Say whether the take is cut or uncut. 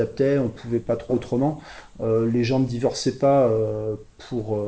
cut